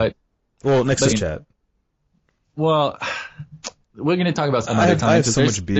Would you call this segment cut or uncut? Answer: cut